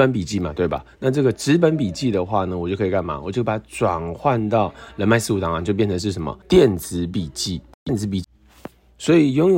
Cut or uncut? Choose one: cut